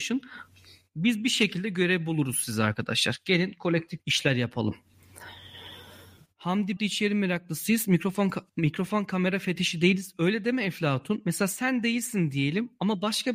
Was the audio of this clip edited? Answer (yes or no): yes